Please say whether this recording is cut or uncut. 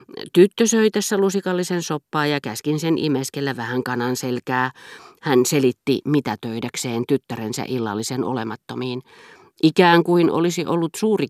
uncut